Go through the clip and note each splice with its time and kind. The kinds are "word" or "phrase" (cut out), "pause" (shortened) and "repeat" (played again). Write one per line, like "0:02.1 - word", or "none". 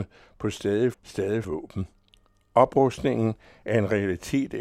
0:00.9 - word
0:01.4 - word